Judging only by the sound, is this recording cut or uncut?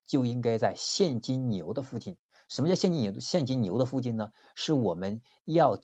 uncut